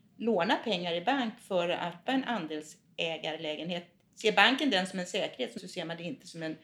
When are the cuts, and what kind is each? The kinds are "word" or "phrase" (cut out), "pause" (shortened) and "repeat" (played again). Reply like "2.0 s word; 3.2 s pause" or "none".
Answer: 2.1 s word; 5.6 s phrase